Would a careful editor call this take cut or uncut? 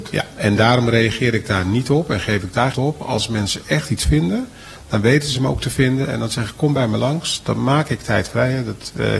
cut